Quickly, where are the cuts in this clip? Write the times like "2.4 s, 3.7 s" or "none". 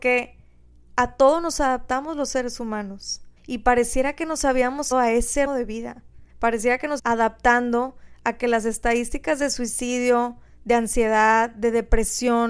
3.4 s, 4.9 s, 5.5 s, 6.3 s, 7.0 s